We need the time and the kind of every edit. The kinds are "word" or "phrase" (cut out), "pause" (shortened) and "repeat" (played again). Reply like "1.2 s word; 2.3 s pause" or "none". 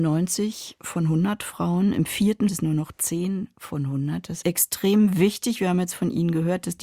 2.5 s phrase; 4.4 s phrase